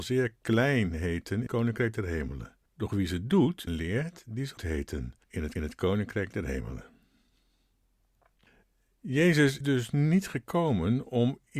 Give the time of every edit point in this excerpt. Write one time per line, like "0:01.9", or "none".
0:01.5
0:02.7
0:03.7
0:04.6
0:05.2
0:05.6
0:09.6